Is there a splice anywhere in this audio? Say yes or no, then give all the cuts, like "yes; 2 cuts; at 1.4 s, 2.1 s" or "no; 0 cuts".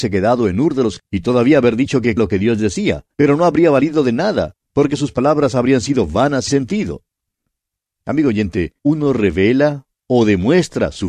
yes; 5 cuts; at 1.0 s, 2.2 s, 3.1 s, 6.5 s, 8.8 s